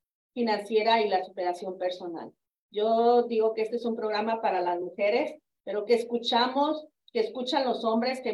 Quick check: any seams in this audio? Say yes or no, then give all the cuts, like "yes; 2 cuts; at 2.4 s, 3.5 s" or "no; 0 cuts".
no; 0 cuts